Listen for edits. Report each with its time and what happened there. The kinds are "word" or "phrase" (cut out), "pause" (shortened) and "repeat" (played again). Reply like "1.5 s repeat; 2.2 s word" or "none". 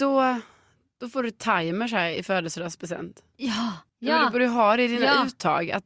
3.9 s pause